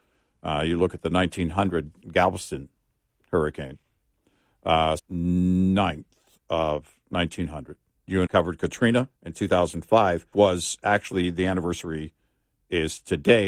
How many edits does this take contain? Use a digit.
6